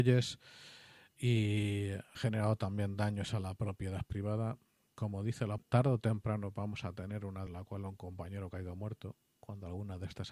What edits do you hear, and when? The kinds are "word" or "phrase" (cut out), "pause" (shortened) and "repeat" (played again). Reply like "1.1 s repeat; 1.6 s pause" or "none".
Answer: 2.1 s word; 5.6 s word; 7.5 s word